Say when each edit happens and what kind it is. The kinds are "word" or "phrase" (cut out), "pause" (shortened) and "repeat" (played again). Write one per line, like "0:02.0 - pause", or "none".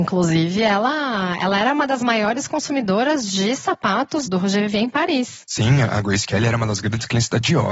0:04.3 - word

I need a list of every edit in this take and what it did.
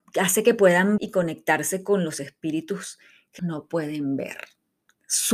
0:01.0 - word
0:03.4 - word

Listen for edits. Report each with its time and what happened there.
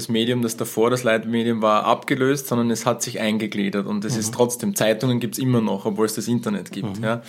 none

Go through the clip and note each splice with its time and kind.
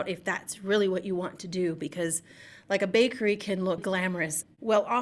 0:03.8 - word

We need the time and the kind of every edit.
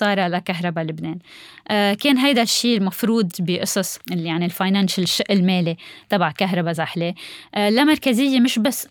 0:03.3 - word

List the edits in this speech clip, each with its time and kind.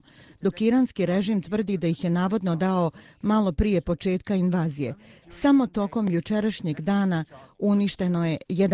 none

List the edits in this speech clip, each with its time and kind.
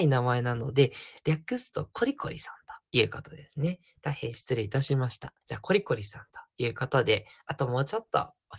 0:05.4 - pause

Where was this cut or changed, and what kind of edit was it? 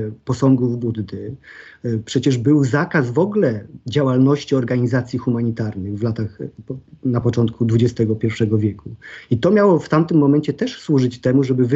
none

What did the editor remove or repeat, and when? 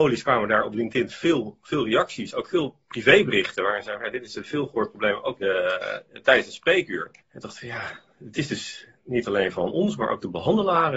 0:05.4 - word
0:07.2 - pause

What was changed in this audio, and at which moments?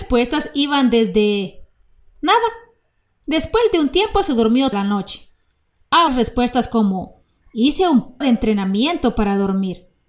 0:04.7 - word
0:06.1 - word
0:08.2 - word

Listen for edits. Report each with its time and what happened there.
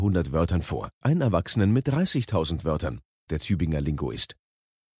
0:01.0 - word
0:03.3 - word

